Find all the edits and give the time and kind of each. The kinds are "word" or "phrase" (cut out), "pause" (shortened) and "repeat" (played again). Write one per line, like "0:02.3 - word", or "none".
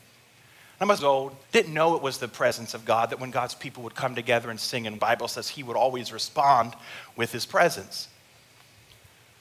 0:01.0 - phrase
0:01.4 - pause
0:05.0 - phrase